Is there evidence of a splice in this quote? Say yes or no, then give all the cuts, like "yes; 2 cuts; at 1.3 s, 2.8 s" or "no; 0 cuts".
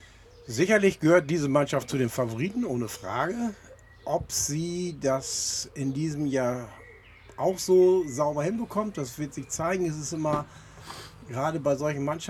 no; 0 cuts